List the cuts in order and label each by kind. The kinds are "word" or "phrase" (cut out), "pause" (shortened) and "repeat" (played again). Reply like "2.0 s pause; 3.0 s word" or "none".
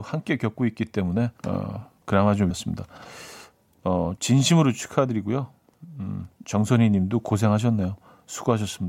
1.4 s pause; 2.5 s phrase; 4.2 s word; 6.3 s pause